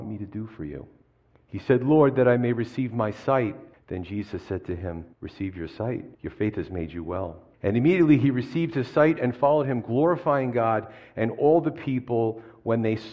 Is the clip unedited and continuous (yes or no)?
no